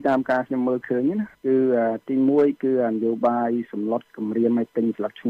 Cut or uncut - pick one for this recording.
cut